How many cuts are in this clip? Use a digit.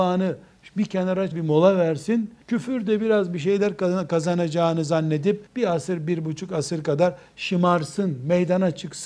3